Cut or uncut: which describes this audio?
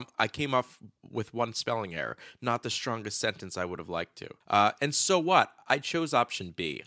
cut